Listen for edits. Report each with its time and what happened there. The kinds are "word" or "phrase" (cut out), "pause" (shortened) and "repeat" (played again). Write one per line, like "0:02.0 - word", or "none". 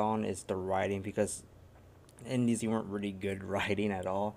0:02.6 - phrase